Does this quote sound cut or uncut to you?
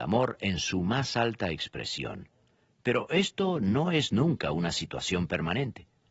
uncut